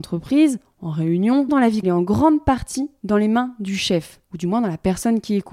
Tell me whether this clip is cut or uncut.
cut